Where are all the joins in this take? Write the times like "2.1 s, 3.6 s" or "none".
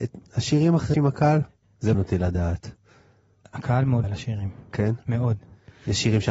0.9 s, 1.9 s, 4.0 s